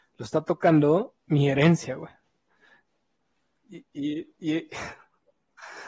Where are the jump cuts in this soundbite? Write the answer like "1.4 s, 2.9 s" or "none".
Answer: 1.2 s

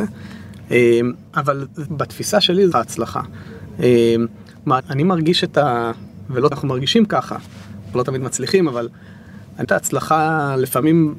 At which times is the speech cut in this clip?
1.3 s, 1.9 s, 2.7 s, 4.8 s, 6.5 s, 7.9 s, 9.6 s

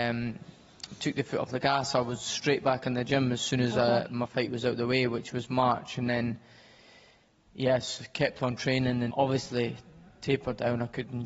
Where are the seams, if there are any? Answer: 9.1 s

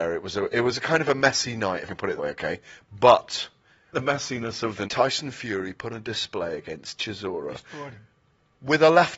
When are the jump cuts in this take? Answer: 1.9 s, 2.2 s, 3.9 s, 4.9 s, 5.9 s, 7.0 s

